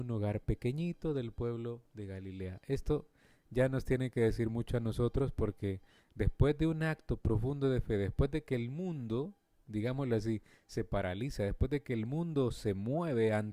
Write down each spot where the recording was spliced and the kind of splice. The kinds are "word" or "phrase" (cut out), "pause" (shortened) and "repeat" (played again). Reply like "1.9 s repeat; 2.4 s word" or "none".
none

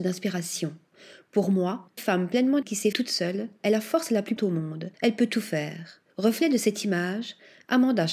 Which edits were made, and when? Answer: 2.0 s word; 2.6 s word; 2.9 s word; 4.4 s word; 4.9 s pause; 6.1 s pause

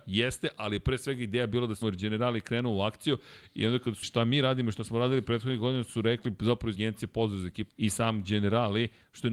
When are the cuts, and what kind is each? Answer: 1.8 s word; 4.0 s word; 6.7 s word; 7.7 s phrase

